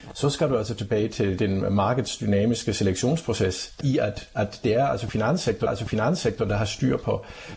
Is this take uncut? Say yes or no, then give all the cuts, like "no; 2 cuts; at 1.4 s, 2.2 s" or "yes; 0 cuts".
no; 3 cuts; at 1.4 s, 3.8 s, 5.7 s